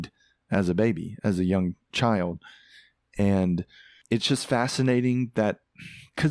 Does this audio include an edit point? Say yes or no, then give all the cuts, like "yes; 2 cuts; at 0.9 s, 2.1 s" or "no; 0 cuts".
no; 0 cuts